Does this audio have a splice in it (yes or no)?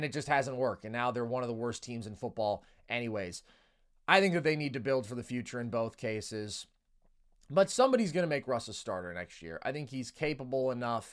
no